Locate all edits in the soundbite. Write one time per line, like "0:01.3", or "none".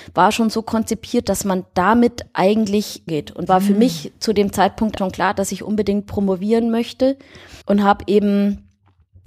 0:03.1
0:03.5
0:05.0
0:07.6